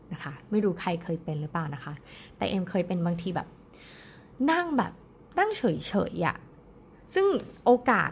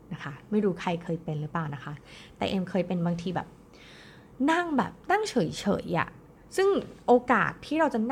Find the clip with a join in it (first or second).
second